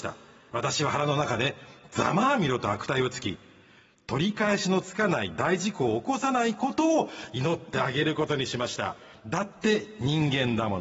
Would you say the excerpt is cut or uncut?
uncut